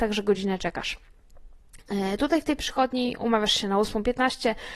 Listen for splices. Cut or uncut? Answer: cut